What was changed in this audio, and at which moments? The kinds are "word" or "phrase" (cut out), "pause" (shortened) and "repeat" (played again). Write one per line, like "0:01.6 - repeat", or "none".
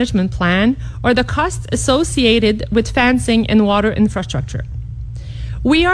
none